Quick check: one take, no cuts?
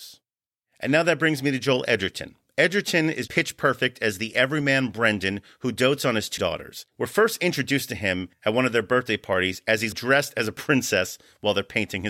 no; 4 cuts; at 3.3 s, 6.4 s, 6.9 s, 9.9 s

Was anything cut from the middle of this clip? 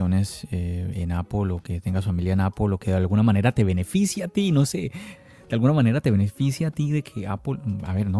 no; 0 cuts

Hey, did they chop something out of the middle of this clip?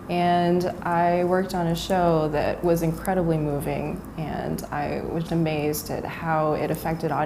yes; 1 cut; at 5.3 s

